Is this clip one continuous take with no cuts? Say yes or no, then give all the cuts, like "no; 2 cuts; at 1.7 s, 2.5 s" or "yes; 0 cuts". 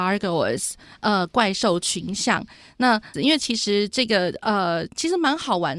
no; 1 cut; at 3.1 s